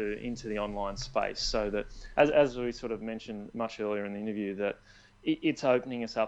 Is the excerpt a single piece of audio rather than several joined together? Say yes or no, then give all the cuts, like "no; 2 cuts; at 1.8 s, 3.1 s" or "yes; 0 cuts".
yes; 0 cuts